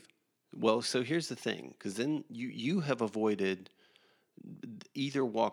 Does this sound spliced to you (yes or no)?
no